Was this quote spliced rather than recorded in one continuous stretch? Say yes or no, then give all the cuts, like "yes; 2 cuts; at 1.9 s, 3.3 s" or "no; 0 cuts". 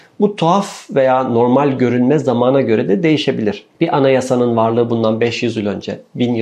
yes; 1 cut; at 3.7 s